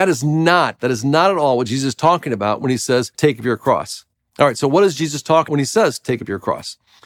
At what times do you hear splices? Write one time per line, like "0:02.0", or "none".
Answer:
0:03.1
0:05.5